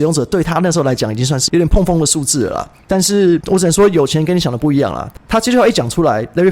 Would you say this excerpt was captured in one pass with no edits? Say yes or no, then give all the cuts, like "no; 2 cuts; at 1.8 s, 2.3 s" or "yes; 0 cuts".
yes; 0 cuts